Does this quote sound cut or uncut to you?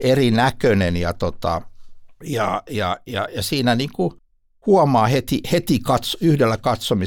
uncut